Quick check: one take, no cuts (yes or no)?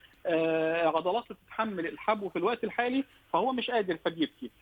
yes